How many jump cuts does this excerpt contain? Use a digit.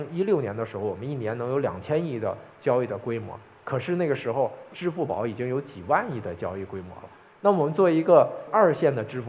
0